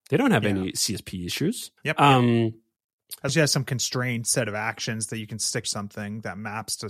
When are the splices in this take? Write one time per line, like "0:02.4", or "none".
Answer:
0:01.8
0:03.3
0:05.6